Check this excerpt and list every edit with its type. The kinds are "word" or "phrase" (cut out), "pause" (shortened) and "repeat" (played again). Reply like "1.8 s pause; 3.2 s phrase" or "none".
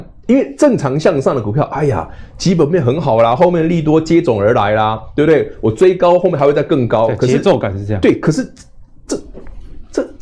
none